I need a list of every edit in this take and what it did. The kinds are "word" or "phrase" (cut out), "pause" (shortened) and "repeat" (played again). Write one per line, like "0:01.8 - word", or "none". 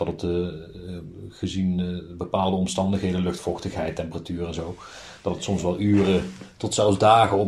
none